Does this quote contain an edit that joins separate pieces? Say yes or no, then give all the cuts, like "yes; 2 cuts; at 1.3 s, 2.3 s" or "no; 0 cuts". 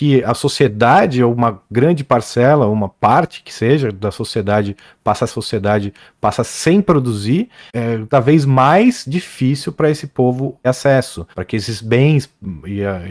yes; 4 cuts; at 5.3 s, 8.1 s, 10.6 s, 11.3 s